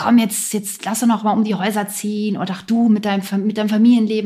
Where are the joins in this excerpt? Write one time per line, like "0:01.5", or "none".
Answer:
none

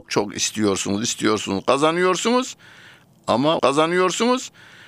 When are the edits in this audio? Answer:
0:03.6

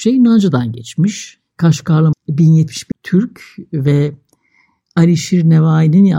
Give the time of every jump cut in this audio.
0:02.1
0:02.9

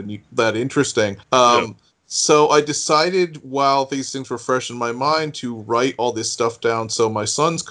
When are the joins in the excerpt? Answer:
0:01.2

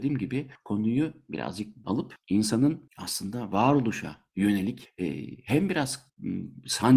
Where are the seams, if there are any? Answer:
0:01.8

